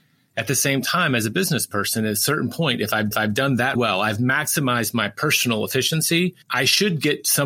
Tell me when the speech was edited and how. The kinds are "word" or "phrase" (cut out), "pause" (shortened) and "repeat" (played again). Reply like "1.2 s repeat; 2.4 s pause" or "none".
3.1 s repeat; 3.8 s word; 6.4 s pause